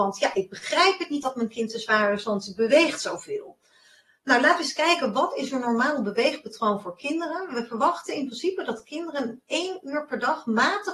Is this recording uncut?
yes; 0 cuts

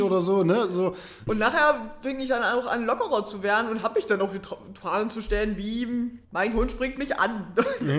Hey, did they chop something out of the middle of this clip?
yes; 2 cuts; at 1.3 s, 6.2 s

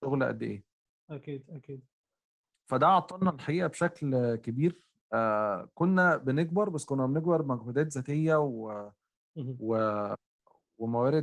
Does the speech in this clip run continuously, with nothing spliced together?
yes; 0 cuts

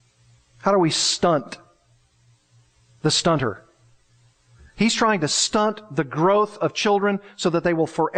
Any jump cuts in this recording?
no; 0 cuts

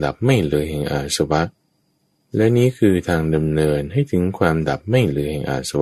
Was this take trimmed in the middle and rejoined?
no; 0 cuts

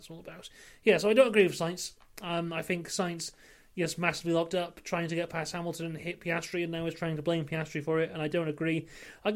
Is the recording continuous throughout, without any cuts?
yes; 0 cuts

